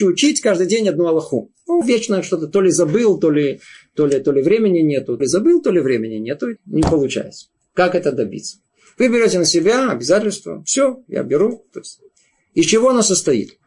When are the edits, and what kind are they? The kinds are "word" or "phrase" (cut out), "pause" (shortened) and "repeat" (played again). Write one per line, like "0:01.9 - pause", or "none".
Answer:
0:01.8 - phrase
0:05.2 - word
0:06.6 - word